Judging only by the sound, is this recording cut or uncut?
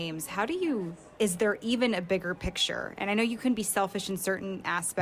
cut